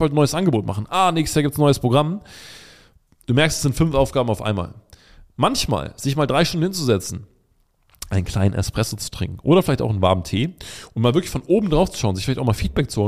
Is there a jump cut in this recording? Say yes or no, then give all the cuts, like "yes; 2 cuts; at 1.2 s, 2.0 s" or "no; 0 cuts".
no; 0 cuts